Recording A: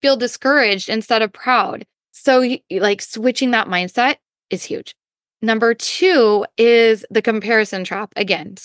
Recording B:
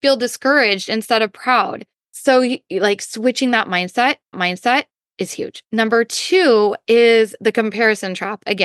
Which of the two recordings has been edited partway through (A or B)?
B